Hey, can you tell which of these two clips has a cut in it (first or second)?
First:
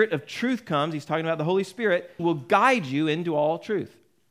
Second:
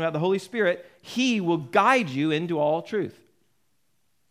first